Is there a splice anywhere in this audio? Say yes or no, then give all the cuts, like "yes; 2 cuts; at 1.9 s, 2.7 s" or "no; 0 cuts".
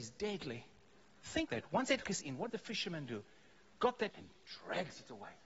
yes; 4 cuts; at 1.5 s, 2.0 s, 2.5 s, 4.1 s